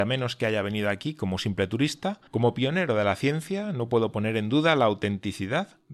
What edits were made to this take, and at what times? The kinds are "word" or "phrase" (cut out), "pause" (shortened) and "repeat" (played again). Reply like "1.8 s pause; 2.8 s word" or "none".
2.3 s pause